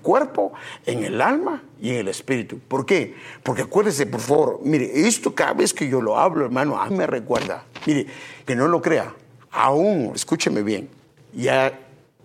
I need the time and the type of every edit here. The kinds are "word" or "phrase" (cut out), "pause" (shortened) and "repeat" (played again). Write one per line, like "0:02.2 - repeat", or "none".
0:06.9 - word
0:08.5 - word
0:10.2 - word
0:11.1 - pause